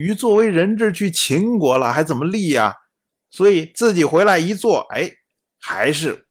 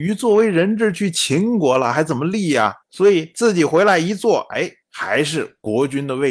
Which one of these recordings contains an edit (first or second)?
second